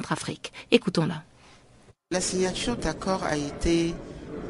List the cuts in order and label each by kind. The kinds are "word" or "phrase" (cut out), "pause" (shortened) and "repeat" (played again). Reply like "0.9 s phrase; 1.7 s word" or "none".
2.8 s word